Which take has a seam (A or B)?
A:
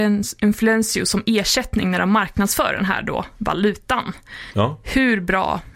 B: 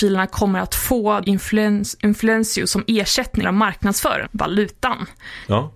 B